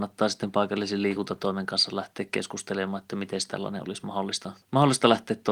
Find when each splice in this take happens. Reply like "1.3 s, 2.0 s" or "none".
4.6 s